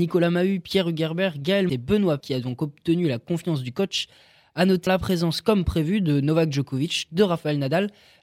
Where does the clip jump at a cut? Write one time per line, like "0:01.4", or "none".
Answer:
0:01.7
0:02.2
0:04.9